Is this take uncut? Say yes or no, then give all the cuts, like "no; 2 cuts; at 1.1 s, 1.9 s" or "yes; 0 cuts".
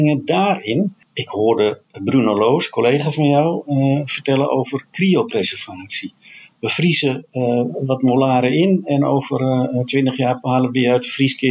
yes; 0 cuts